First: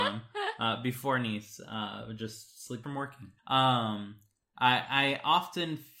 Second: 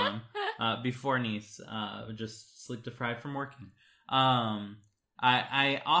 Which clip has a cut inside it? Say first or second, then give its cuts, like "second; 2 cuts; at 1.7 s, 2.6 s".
first; 2 cuts; at 2.8 s, 3.4 s